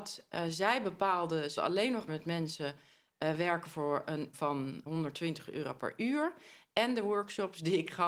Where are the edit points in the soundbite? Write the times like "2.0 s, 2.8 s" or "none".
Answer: 1.6 s, 2.1 s, 4.3 s, 4.9 s